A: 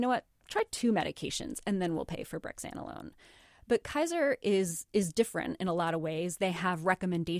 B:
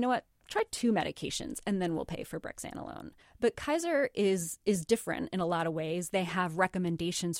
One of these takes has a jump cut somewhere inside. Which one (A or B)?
B